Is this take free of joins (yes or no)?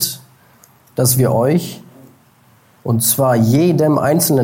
yes